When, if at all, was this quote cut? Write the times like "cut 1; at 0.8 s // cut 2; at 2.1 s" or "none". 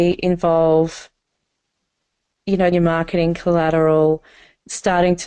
cut 1; at 2.7 s